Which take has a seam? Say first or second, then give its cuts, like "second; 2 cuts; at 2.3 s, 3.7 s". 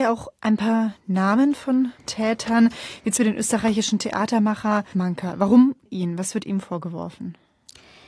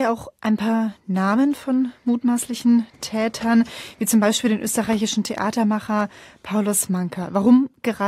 first; 4 cuts; at 2.0 s, 3.2 s, 4.9 s, 5.9 s